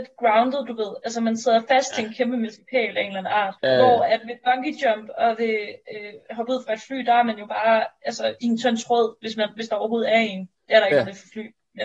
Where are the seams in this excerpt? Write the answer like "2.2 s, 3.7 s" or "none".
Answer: 3.6 s, 10.6 s